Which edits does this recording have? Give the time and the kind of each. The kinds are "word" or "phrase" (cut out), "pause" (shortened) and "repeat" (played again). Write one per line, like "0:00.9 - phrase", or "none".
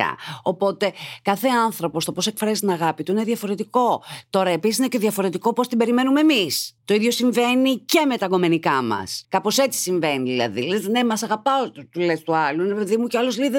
0:06.8 - pause
0:09.2 - pause